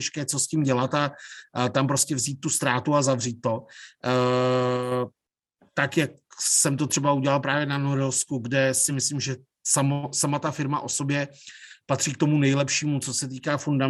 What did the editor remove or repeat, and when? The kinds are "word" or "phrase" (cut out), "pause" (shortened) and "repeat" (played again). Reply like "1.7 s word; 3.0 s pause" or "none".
none